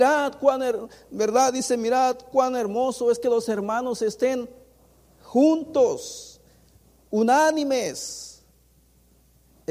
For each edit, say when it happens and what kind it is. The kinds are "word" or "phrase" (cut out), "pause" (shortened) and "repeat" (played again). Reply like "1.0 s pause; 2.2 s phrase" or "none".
none